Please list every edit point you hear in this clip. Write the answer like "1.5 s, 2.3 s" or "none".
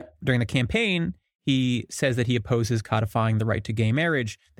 none

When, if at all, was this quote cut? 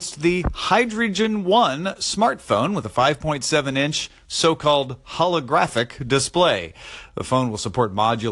none

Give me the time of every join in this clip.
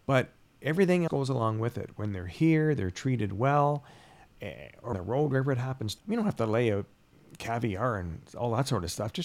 1.1 s, 4.9 s, 6.0 s

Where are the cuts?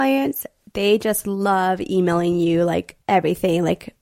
3.0 s

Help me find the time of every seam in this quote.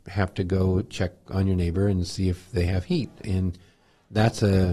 none

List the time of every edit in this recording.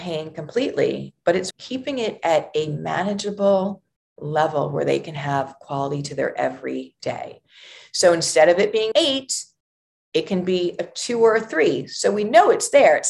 1.5 s, 8.9 s

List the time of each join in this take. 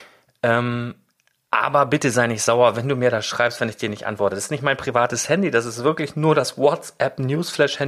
none

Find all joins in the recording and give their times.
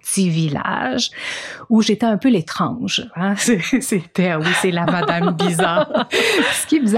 none

